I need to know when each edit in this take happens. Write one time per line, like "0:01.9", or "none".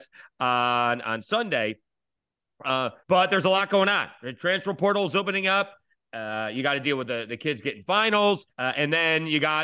0:03.0
0:08.5